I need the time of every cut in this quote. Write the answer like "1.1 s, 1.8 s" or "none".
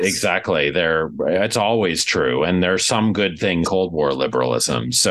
3.6 s